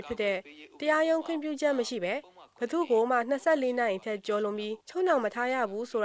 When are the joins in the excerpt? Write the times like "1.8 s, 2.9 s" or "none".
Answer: 4.8 s